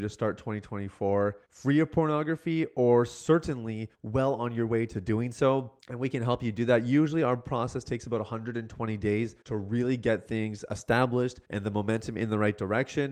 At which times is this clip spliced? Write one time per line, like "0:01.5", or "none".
0:01.4
0:03.9
0:05.8
0:09.4
0:11.4